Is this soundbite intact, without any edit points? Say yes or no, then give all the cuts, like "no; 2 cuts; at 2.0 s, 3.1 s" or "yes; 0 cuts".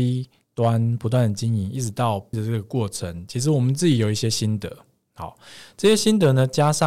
no; 1 cut; at 2.3 s